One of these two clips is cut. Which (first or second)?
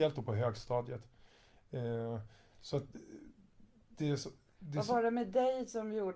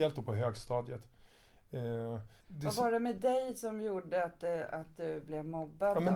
second